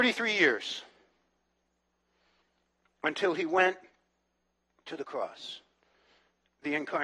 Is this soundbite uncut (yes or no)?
yes